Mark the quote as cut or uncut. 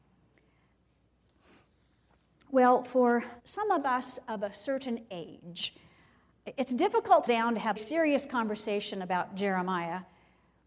cut